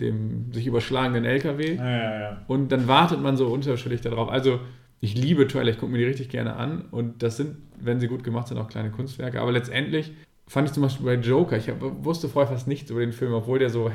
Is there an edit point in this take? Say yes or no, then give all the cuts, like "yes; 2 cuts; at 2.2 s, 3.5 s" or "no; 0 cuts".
yes; 1 cut; at 10.2 s